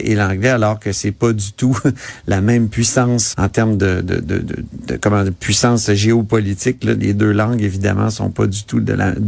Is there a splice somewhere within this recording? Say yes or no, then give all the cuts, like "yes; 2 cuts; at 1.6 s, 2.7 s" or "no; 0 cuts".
yes; 1 cut; at 3.3 s